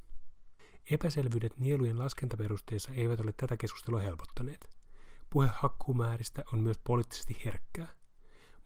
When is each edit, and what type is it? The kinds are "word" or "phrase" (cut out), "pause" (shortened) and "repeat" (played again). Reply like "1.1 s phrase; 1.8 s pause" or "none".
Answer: none